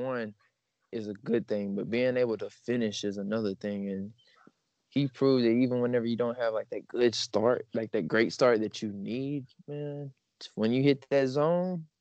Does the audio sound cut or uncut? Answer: uncut